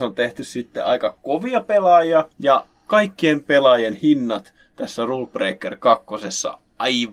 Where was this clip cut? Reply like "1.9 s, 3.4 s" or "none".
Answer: 2.3 s